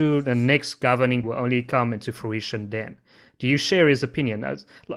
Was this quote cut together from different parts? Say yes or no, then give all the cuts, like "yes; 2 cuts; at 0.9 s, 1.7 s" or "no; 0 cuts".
yes; 1 cut; at 1.2 s